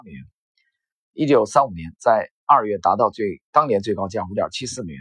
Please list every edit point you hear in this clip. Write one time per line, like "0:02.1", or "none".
0:03.5